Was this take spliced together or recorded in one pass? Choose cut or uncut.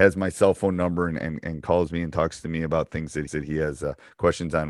cut